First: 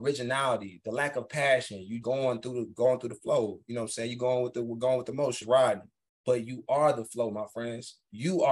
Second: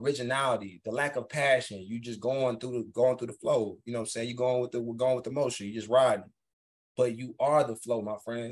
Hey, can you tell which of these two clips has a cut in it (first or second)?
first